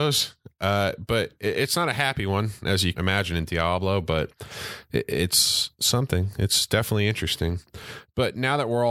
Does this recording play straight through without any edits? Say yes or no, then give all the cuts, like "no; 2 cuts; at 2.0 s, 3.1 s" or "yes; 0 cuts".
no; 1 cut; at 2.9 s